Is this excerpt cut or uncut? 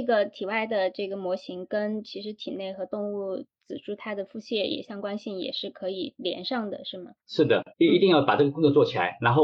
cut